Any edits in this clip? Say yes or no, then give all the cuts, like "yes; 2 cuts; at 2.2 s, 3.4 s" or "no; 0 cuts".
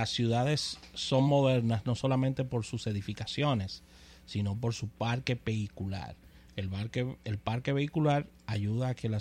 no; 0 cuts